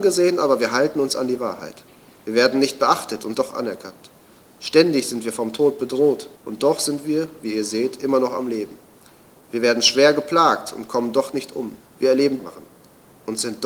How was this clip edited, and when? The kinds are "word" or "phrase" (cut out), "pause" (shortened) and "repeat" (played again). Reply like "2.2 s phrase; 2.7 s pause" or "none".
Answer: 3.3 s word; 6.4 s pause; 11.9 s pause; 12.4 s phrase